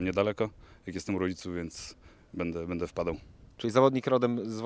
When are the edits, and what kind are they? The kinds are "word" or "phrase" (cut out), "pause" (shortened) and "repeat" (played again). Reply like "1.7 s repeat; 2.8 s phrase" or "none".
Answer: none

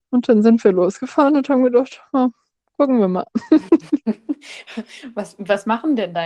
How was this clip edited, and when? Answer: none

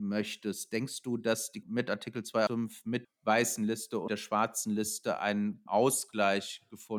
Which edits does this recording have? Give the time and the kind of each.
1.6 s word; 2.5 s word; 3.0 s word; 4.1 s word; 5.7 s word

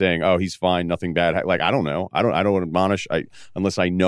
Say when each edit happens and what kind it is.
none

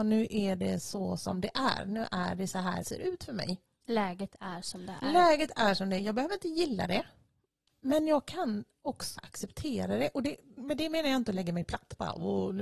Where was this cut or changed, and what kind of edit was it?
2.8 s word; 9.2 s word; 10.6 s word

